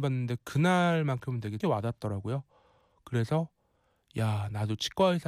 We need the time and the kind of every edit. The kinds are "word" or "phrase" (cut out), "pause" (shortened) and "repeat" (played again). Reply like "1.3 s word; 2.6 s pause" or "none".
1.6 s word